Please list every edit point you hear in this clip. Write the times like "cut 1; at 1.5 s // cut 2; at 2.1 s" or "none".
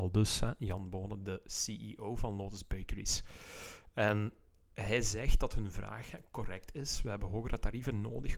none